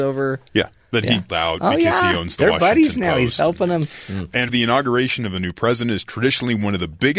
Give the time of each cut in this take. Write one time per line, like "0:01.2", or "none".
0:01.3
0:04.5